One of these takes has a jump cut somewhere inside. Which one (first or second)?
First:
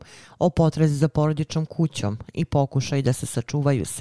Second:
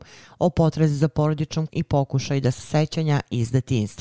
second